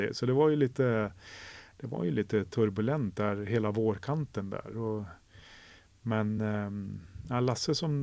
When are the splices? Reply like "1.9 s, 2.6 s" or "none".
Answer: none